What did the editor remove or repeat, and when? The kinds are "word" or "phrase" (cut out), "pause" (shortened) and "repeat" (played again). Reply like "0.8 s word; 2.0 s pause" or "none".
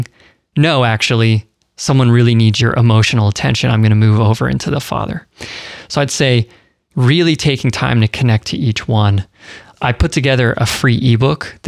none